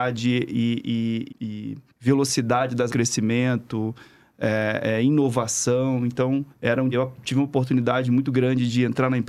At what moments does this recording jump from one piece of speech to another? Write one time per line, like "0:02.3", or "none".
0:01.3
0:01.9
0:02.9
0:06.5
0:06.9